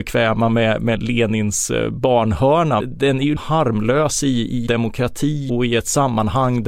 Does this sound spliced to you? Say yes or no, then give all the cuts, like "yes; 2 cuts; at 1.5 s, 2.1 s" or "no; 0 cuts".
yes; 5 cuts; at 1.0 s, 2.8 s, 3.4 s, 4.7 s, 5.5 s